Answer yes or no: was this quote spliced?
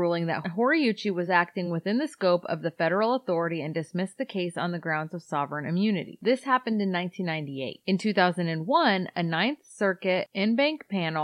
no